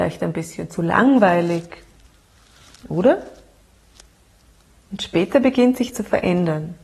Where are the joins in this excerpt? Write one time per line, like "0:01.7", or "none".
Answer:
0:05.9